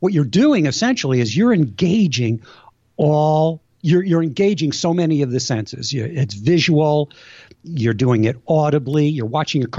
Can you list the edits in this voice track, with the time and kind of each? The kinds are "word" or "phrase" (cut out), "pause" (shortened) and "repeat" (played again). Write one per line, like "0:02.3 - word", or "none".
none